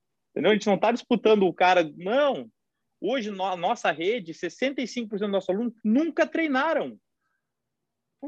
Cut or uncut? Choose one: cut